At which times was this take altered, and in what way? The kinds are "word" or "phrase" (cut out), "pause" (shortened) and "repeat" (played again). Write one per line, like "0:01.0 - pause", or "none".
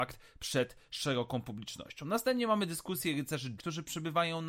0:03.6 - word